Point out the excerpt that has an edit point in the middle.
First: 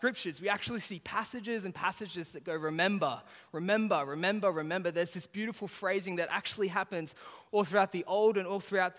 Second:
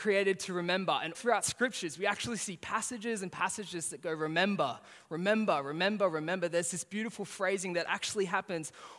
second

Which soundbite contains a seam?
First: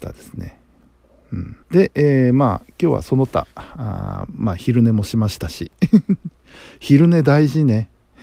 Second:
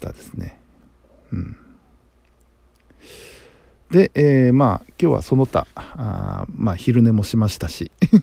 first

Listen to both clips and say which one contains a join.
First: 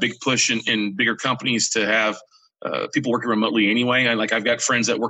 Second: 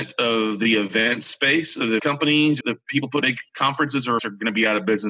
second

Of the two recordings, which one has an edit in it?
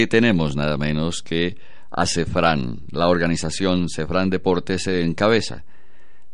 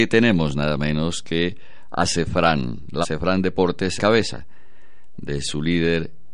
second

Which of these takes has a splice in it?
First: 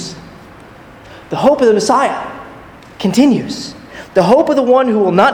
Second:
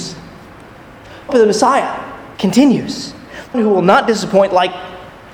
second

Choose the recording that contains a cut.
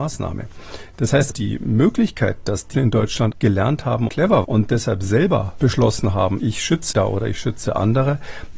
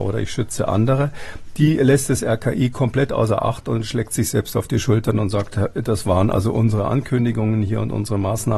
first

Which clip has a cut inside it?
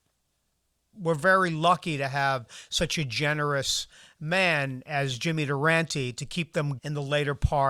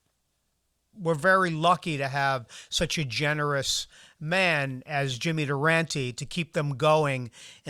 first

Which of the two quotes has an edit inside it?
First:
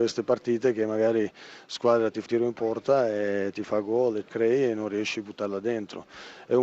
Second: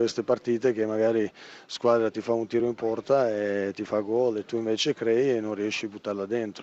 first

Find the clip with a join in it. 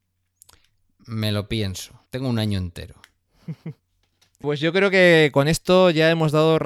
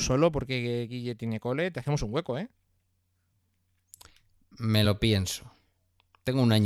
first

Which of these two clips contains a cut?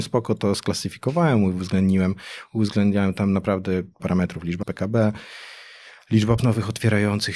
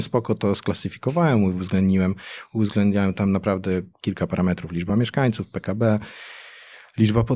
first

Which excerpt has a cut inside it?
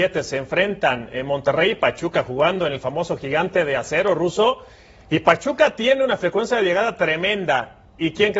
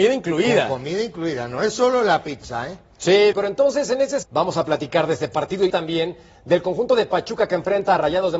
second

